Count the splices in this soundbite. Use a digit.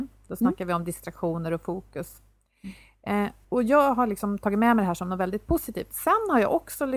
1